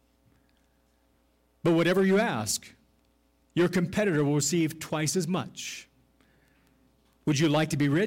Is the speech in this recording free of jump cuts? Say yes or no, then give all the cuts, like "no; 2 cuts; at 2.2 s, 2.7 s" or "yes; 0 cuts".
yes; 0 cuts